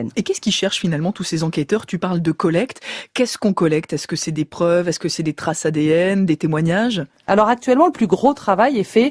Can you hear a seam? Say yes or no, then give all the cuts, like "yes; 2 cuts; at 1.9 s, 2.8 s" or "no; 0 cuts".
no; 0 cuts